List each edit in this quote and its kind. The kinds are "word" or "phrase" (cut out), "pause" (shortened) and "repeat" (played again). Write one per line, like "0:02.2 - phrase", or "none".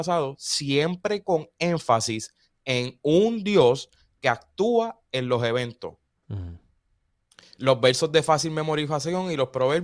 0:06.1 - pause